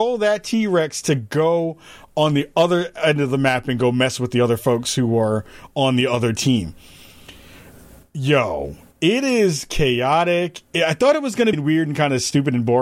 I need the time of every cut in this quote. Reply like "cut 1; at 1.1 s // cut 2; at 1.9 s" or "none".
cut 1; at 11.5 s